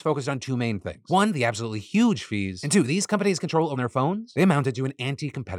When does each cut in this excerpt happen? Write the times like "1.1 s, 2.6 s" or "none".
3.4 s, 3.8 s